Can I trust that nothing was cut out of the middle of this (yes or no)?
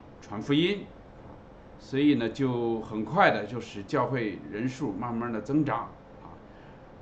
yes